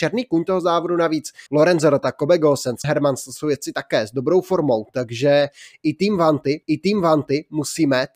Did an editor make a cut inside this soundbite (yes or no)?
yes